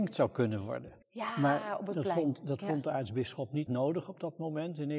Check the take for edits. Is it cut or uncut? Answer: cut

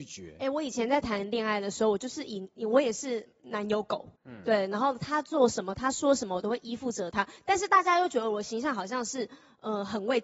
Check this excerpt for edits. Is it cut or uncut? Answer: cut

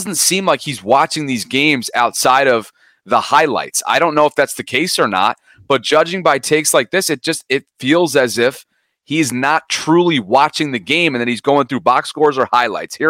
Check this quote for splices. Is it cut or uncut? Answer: uncut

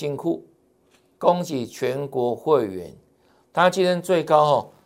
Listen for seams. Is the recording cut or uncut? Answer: uncut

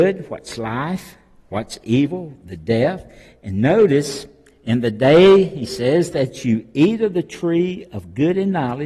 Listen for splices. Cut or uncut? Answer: uncut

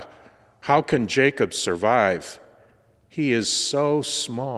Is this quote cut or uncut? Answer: uncut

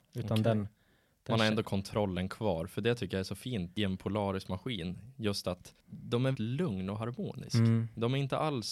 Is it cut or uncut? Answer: cut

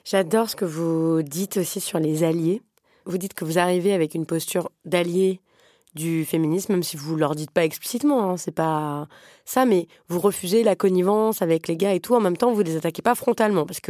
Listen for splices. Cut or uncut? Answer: uncut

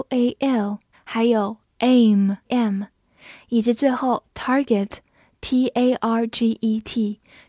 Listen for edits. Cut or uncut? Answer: cut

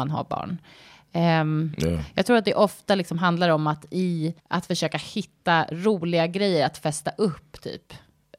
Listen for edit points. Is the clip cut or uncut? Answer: cut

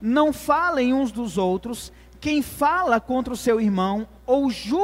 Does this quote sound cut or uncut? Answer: uncut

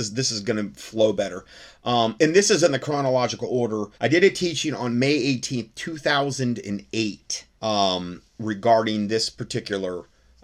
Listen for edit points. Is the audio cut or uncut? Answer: cut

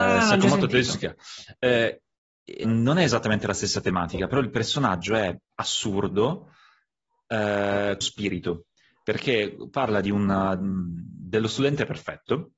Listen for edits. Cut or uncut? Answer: cut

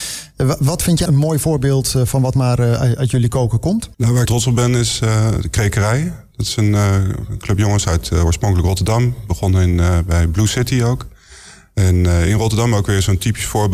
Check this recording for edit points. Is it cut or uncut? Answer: cut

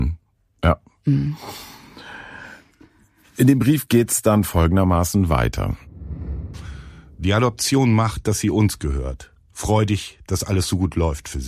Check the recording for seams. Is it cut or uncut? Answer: uncut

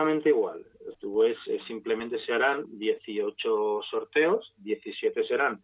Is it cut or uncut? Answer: cut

